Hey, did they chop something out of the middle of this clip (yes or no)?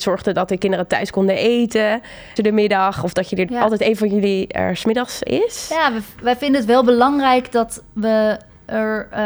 yes